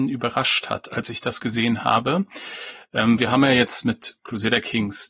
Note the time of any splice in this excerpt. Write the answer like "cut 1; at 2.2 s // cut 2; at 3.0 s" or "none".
cut 1; at 3.2 s